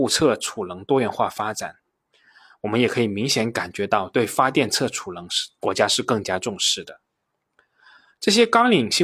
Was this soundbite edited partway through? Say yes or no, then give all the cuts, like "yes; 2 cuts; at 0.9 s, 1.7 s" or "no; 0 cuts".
no; 0 cuts